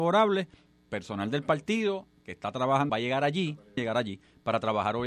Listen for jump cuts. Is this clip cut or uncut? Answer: cut